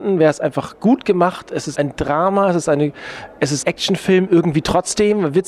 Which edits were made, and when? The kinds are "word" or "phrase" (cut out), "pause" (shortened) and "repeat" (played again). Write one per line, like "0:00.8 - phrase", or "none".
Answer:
0:01.7 - word
0:03.6 - word